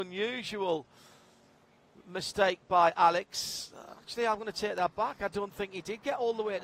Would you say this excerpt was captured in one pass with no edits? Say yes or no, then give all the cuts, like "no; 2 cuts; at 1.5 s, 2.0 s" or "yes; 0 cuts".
yes; 0 cuts